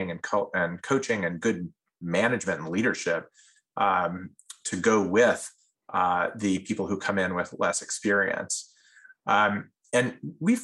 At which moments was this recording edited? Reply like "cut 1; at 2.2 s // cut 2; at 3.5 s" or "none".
none